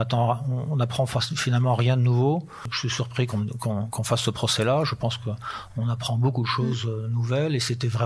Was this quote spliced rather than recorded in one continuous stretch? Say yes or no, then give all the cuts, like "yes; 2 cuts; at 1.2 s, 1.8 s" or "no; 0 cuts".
no; 0 cuts